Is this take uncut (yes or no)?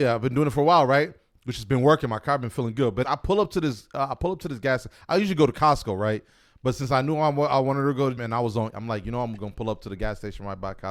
no